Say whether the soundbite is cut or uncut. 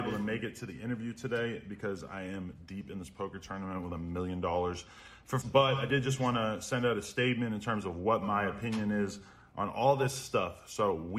cut